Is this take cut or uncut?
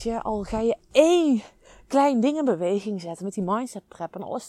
uncut